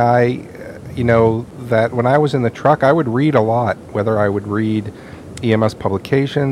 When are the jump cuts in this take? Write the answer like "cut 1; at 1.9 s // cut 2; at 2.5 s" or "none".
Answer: cut 1; at 5.4 s